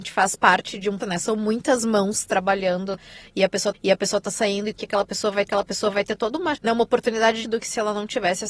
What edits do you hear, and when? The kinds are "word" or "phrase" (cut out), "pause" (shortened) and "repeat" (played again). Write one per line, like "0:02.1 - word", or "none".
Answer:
0:01.0 - word
0:03.7 - repeat
0:04.8 - word
0:05.5 - repeat
0:06.5 - word
0:07.4 - word